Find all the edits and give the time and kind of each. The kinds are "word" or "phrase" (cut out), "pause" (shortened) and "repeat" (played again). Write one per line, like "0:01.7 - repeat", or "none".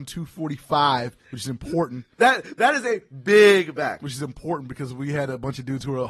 0:01.2 - pause